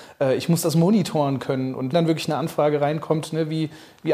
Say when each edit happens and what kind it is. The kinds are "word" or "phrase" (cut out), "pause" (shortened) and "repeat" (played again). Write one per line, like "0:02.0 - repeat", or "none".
0:01.9 - word